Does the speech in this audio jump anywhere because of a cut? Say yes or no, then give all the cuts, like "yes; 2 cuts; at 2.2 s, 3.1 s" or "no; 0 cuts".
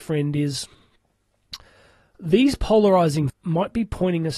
yes; 1 cut; at 3.3 s